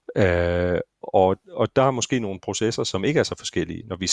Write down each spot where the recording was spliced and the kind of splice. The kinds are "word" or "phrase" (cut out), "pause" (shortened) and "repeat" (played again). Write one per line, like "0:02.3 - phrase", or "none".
0:01.4 - pause